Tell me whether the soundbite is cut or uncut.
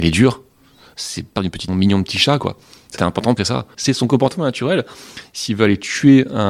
cut